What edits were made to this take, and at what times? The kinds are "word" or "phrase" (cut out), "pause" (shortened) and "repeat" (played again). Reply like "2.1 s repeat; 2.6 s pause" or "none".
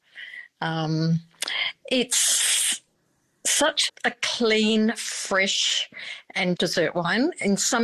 3.9 s word; 6.6 s word